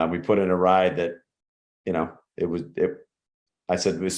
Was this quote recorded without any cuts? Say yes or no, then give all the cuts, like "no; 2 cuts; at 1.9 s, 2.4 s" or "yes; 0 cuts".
yes; 0 cuts